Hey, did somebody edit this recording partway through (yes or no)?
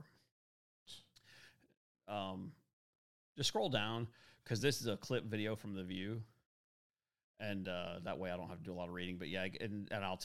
no